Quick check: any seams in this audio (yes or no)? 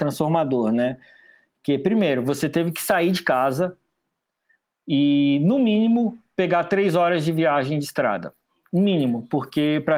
no